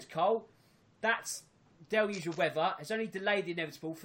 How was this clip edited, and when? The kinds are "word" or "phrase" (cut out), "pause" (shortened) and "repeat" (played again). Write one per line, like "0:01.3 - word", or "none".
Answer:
none